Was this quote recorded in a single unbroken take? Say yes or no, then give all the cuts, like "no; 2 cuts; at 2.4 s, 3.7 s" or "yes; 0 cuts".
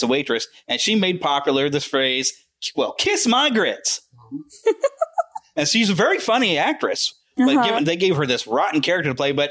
yes; 0 cuts